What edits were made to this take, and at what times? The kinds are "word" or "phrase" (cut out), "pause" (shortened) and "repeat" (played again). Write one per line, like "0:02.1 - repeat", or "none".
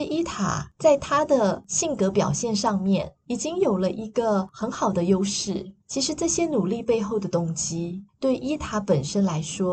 0:05.8 - pause
0:08.1 - pause